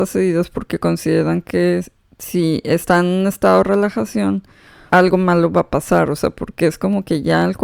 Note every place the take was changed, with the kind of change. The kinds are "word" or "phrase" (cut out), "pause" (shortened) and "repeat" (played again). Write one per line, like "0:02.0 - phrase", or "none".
0:04.9 - word